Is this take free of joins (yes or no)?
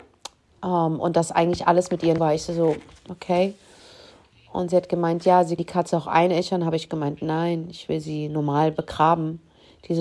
no